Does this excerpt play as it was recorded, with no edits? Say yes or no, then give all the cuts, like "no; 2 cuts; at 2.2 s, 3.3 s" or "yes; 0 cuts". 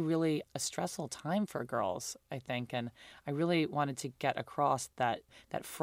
yes; 0 cuts